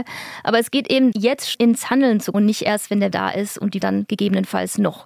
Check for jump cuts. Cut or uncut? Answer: cut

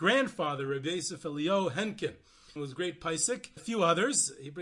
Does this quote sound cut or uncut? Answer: cut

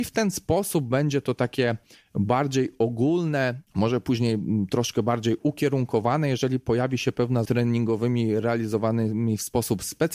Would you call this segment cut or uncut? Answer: cut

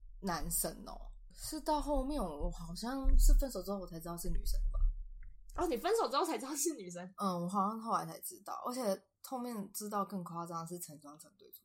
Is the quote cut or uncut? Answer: cut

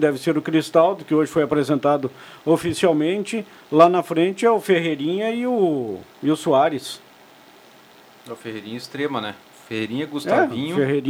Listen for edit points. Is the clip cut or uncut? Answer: uncut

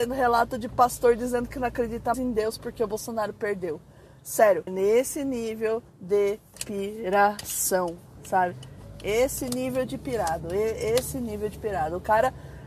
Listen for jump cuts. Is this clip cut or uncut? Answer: cut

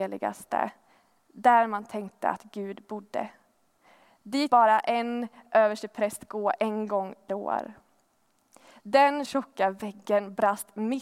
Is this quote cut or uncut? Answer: cut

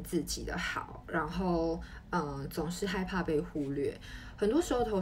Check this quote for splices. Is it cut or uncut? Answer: uncut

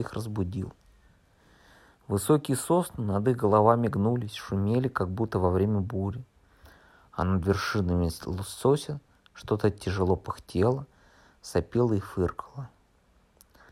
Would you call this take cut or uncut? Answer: uncut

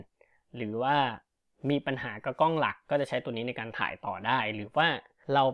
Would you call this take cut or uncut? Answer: uncut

